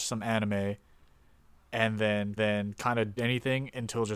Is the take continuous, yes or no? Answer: no